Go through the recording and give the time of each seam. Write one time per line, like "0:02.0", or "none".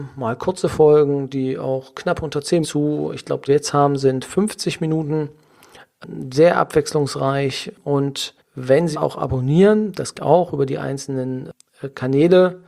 0:02.6
0:03.5
0:08.4
0:08.9
0:10.1